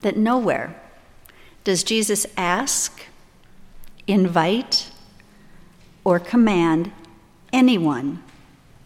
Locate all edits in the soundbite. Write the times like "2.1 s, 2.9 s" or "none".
none